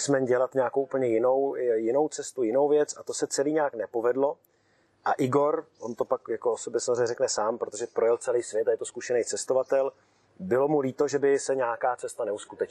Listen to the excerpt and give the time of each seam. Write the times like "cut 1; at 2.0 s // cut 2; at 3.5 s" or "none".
none